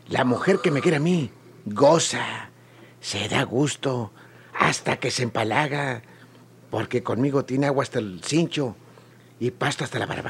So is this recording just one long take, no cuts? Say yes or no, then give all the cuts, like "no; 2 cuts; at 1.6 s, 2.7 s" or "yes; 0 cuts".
yes; 0 cuts